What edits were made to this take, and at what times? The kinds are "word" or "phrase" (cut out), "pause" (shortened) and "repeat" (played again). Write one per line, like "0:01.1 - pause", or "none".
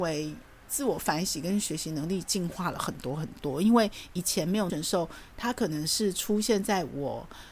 0:04.7 - phrase